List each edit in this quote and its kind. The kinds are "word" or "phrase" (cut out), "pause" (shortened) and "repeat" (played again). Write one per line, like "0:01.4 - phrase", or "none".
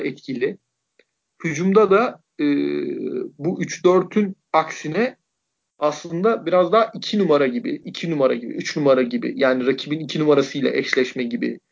0:04.5 - pause